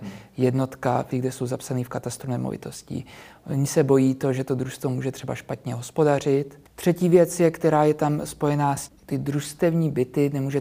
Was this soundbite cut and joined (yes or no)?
yes